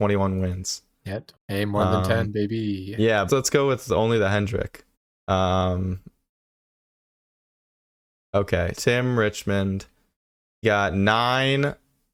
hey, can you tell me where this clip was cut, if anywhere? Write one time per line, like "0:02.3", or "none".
0:01.4
0:03.3
0:04.9
0:08.7
0:10.6